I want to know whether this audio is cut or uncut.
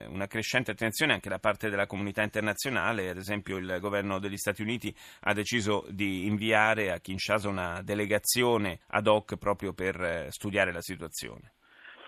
cut